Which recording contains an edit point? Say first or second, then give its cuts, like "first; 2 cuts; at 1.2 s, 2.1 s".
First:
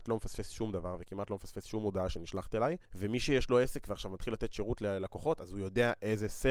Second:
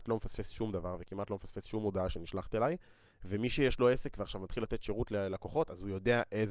first; 1 cut; at 2.8 s